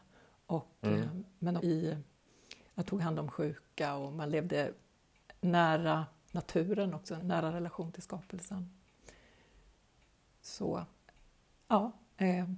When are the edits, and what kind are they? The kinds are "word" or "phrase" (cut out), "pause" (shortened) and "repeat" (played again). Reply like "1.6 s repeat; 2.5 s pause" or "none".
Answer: 1.6 s word; 2.9 s word; 7.2 s word